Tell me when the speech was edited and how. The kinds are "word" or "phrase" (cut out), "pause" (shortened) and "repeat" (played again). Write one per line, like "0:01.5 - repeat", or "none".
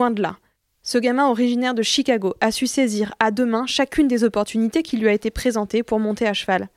none